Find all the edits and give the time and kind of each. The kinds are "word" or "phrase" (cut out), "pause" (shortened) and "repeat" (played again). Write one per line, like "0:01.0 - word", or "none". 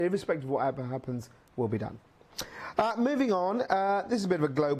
none

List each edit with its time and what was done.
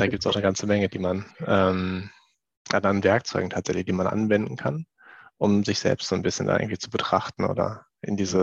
0:01.3 - pause

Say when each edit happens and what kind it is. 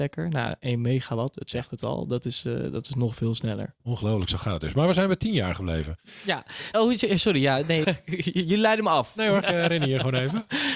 0:03.8 - pause
0:06.7 - word
0:07.8 - word
0:09.4 - phrase

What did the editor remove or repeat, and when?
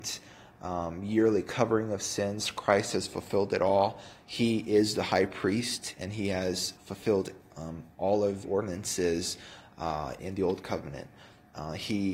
0:06.8 - pause
0:08.4 - word
0:10.2 - word

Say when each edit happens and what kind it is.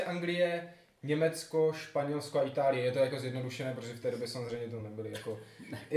none

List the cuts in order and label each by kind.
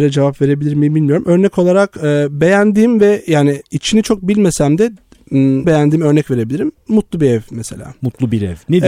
0:03.7 - pause
0:05.6 - word

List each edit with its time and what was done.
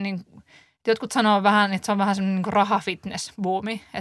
none

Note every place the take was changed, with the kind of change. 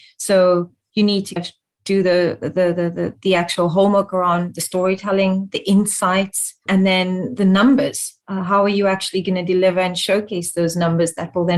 0:01.4 - word
0:06.7 - word

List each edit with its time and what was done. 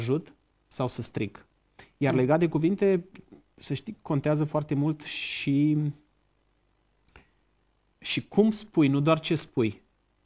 none

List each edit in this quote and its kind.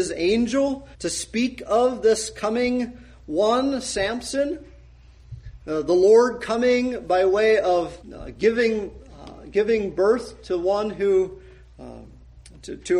0:00.9 - pause
0:08.0 - pause

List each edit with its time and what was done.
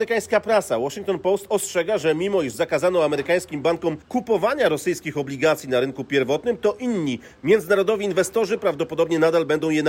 0:04.0 - pause

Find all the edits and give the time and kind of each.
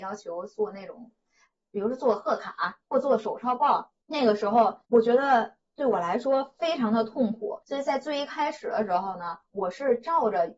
0:02.8 - pause
0:04.0 - pause
0:04.8 - pause
0:07.6 - pause
0:09.4 - pause

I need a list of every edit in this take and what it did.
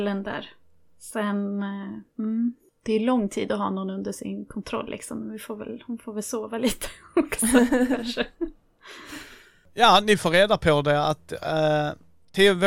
0:08.3 - pause

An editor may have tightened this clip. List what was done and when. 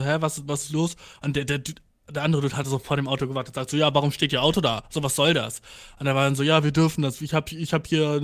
none

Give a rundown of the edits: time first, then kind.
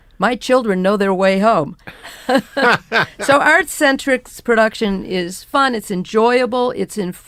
none

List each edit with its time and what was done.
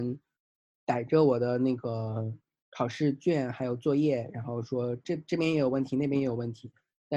0:02.6 - pause

